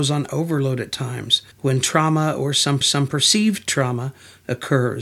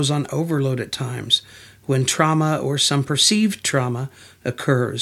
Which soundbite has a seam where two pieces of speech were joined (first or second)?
first